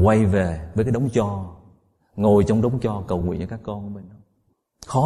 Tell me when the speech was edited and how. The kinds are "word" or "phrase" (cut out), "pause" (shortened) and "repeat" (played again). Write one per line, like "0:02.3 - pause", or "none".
none